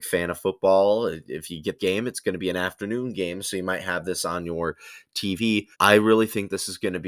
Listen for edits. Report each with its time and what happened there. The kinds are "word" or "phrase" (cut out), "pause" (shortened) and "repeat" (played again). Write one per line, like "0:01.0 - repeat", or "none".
0:01.8 - word
0:05.7 - pause